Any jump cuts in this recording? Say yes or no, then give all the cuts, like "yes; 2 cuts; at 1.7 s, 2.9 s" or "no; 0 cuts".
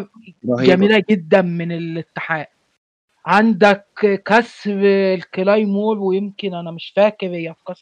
no; 0 cuts